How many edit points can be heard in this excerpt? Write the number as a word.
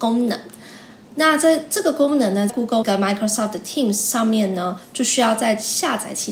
two